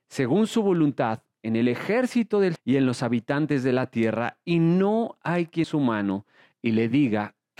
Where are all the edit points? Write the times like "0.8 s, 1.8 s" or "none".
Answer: 2.6 s, 5.6 s